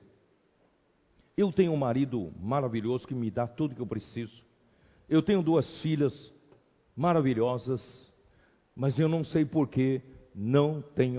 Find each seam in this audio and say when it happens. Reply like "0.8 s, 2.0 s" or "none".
none